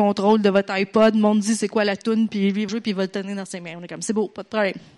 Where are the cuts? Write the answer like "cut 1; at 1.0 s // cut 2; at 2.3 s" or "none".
cut 1; at 2.7 s

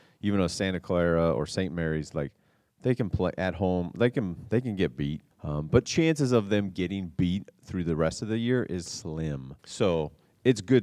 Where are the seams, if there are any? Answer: cut 1; at 5.3 s // cut 2; at 5.8 s // cut 3; at 8.9 s // cut 4; at 9.6 s

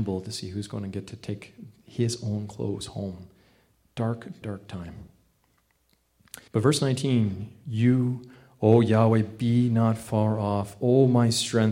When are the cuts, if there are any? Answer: cut 1; at 4.4 s // cut 2; at 6.5 s

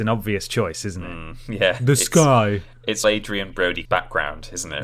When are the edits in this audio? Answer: cut 1; at 3.0 s // cut 2; at 3.5 s // cut 3; at 3.8 s

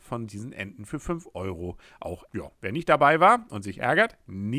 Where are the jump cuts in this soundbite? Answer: cut 1; at 2.3 s

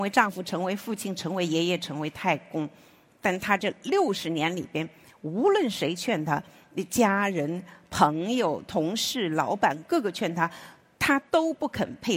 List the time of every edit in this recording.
cut 1; at 11.3 s

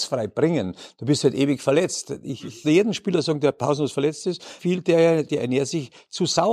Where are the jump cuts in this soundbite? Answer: cut 1; at 2.6 s // cut 2; at 4.6 s // cut 3; at 5.3 s

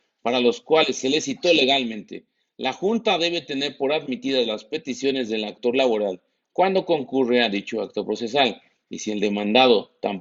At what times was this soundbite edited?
none

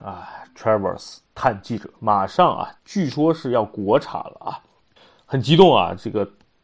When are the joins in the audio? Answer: cut 1; at 1.3 s // cut 2; at 2.0 s // cut 3; at 2.8 s // cut 4; at 5.0 s

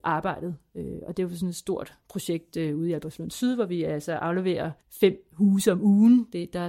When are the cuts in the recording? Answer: cut 1; at 4.8 s

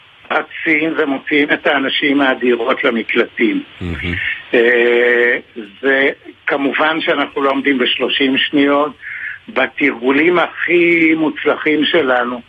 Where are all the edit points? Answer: none

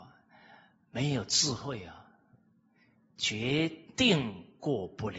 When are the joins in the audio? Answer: none

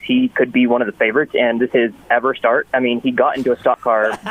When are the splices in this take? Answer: cut 1; at 1.7 s // cut 2; at 2.0 s

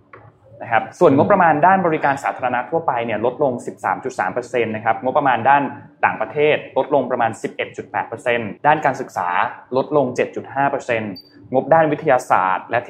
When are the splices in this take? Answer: cut 1; at 8.6 s

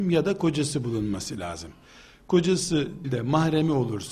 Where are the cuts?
cut 1; at 3.0 s

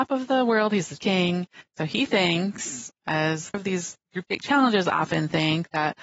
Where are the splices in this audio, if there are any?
cut 1; at 1.0 s // cut 2; at 3.5 s

